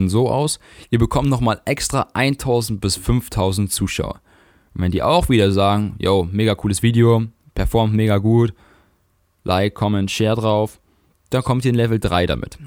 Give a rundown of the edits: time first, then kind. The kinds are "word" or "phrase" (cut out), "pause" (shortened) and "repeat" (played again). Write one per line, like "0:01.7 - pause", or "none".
none